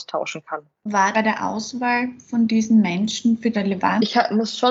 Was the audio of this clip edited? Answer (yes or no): yes